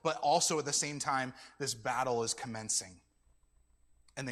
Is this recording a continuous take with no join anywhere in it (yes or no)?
yes